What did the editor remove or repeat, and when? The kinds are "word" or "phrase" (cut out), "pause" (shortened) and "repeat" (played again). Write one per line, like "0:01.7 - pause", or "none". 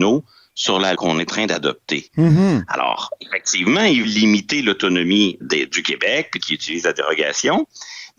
0:00.9 - word
0:01.3 - word
0:04.0 - word
0:05.4 - word
0:06.4 - phrase